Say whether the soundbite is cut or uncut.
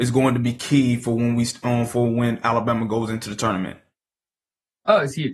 uncut